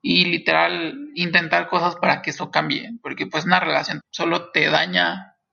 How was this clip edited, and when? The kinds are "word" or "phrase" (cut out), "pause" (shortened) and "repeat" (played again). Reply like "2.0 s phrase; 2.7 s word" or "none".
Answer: 4.0 s word

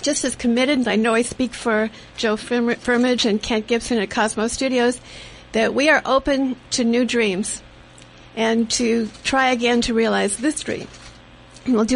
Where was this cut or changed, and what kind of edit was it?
none

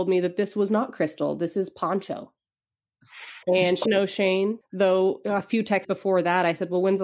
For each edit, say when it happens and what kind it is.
3.4 s pause; 3.9 s word; 4.6 s pause; 5.8 s word

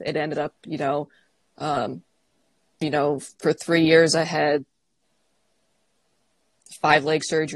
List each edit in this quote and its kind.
2.3 s pause; 3.3 s pause

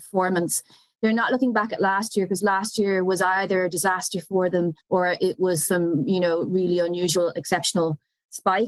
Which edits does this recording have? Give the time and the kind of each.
4.8 s pause

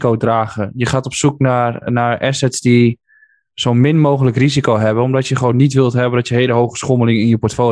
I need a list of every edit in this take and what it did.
none

